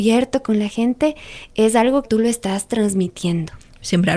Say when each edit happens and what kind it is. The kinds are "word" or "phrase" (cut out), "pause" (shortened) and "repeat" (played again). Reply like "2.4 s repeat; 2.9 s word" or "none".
2.0 s phrase